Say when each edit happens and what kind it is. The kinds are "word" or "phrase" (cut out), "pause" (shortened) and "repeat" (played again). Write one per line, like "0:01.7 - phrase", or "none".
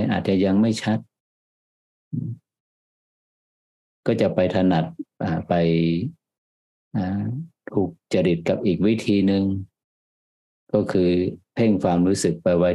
none